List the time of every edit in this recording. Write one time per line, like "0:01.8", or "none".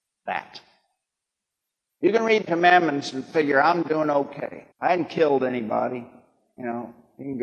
0:02.5
0:04.7